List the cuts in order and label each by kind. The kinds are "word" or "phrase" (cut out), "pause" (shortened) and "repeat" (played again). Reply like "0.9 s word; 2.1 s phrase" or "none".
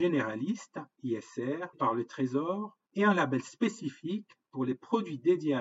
1.7 s word; 2.8 s pause